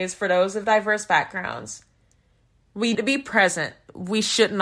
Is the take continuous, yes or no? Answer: no